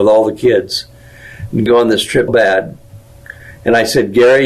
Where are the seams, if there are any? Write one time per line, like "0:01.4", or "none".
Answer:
0:01.7
0:02.3